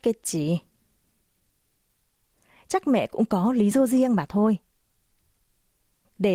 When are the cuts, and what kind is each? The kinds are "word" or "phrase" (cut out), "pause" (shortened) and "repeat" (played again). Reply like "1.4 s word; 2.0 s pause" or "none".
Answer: none